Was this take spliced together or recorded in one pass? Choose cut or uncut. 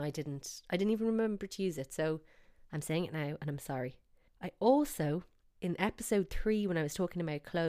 uncut